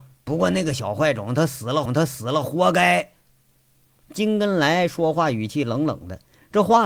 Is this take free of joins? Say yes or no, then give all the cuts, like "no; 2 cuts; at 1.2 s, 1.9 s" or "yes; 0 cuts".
no; 1 cut; at 1.9 s